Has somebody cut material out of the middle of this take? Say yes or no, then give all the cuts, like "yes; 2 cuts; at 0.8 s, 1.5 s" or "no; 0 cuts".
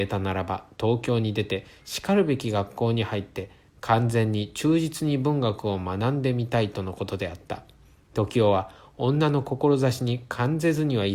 no; 0 cuts